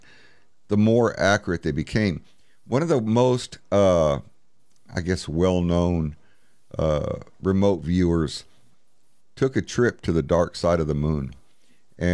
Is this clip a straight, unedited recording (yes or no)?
yes